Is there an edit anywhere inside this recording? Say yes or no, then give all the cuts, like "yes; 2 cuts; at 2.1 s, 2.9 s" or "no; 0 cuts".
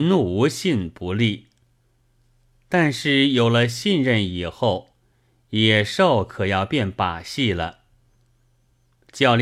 no; 0 cuts